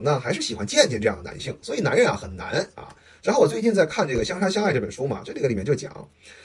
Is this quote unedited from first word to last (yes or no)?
yes